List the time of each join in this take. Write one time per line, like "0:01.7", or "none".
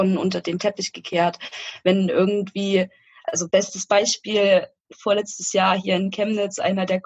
none

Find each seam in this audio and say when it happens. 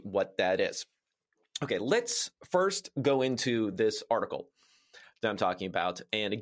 none

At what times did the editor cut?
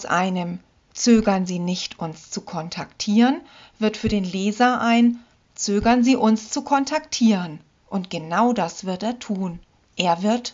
none

